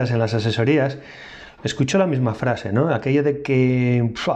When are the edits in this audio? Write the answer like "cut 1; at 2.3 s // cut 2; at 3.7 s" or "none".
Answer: none